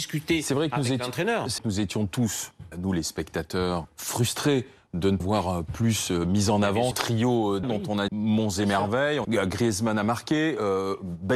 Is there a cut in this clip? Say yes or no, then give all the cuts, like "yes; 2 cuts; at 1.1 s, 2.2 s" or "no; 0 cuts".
yes; 8 cuts; at 1.6 s, 2.7 s, 3.8 s, 5.2 s, 6.9 s, 7.6 s, 8.1 s, 9.2 s